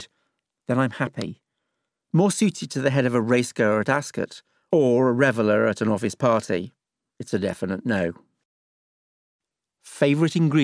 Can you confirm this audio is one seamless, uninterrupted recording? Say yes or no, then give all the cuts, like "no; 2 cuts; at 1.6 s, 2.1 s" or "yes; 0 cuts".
yes; 0 cuts